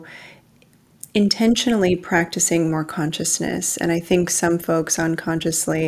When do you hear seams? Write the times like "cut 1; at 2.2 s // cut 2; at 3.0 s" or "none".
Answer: none